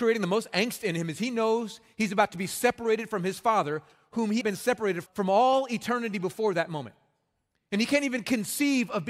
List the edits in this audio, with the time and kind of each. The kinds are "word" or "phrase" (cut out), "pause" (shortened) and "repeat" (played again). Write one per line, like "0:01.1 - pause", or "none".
0:04.4 - phrase
0:05.1 - word